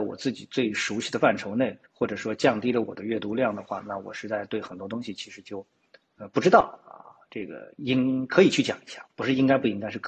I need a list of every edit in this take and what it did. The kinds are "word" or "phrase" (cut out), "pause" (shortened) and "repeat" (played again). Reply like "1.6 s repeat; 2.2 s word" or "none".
1.9 s pause